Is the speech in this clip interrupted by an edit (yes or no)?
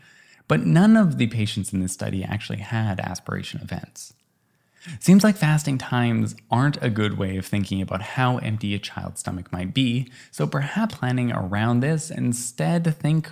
yes